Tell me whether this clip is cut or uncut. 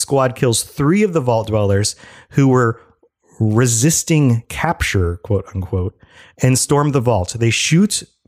uncut